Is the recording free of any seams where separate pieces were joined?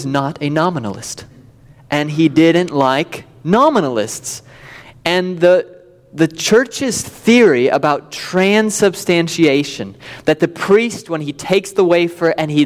yes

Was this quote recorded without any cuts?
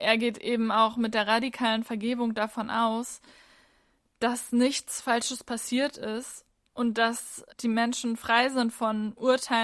no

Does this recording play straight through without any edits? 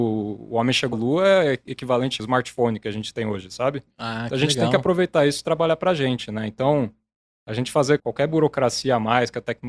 no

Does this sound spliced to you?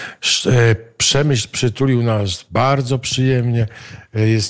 no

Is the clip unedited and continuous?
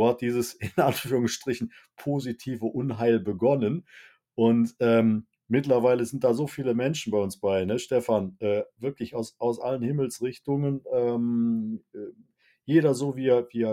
yes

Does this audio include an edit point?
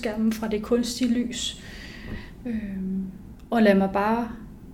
no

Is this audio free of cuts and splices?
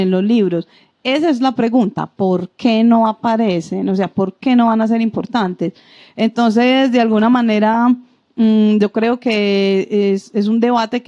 yes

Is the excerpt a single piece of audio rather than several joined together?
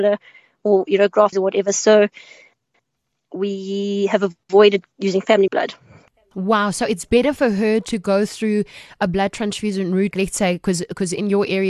no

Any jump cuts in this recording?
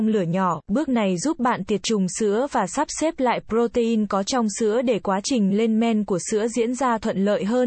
no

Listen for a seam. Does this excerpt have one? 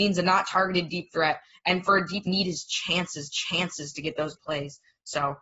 yes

